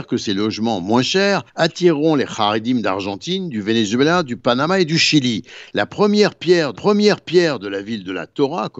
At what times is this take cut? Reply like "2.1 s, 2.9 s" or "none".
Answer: 1.5 s, 6.7 s

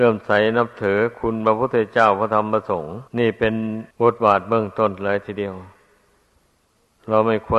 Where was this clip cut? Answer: 3.1 s, 3.9 s

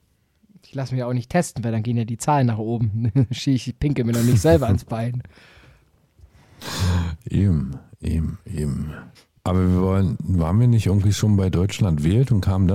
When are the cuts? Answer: 9.1 s

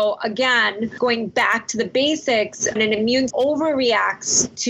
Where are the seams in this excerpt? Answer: 1.0 s, 2.8 s, 3.3 s

